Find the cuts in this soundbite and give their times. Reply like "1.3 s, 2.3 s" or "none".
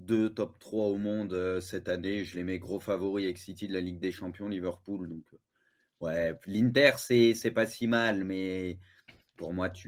none